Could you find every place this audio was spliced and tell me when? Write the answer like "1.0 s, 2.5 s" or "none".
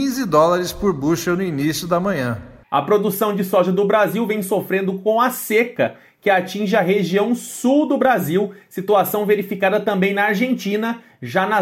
none